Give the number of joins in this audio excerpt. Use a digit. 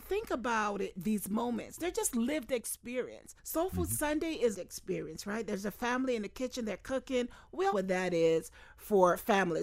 3